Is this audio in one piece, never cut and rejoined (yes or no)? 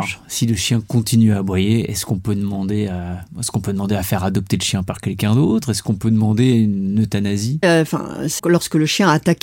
no